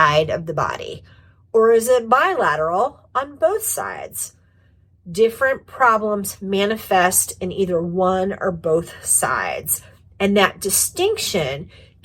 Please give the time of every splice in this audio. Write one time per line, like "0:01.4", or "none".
none